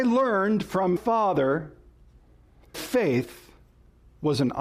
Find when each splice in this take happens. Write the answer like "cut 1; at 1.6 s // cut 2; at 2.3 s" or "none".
cut 1; at 1.0 s // cut 2; at 2.7 s